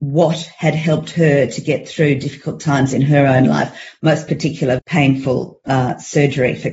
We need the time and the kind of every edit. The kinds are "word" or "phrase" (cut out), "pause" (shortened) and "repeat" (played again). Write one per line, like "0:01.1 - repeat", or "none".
0:04.8 - word